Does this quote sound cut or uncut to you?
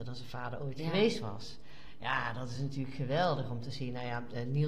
uncut